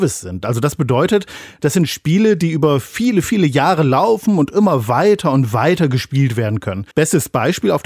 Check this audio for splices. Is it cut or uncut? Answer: cut